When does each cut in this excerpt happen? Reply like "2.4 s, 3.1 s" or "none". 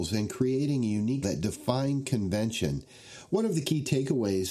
1.2 s